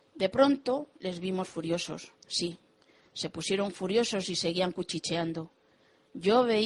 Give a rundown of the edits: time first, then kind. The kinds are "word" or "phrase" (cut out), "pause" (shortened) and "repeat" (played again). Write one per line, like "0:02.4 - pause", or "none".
0:02.2 - pause